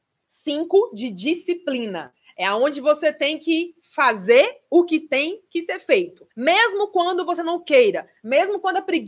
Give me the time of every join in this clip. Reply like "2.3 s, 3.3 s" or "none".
6.3 s